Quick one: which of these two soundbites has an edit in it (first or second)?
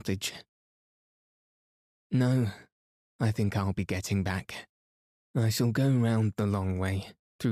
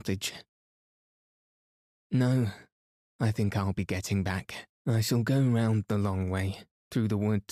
second